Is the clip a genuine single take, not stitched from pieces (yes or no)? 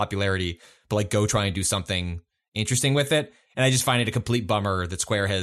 yes